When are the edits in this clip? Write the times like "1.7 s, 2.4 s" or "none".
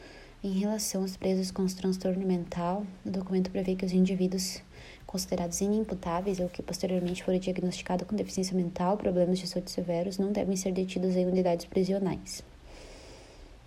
none